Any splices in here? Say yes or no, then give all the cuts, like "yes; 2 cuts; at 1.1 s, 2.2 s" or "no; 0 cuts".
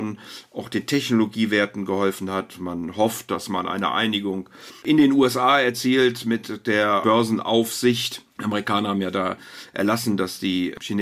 yes; 3 cuts; at 4.8 s, 7.0 s, 8.3 s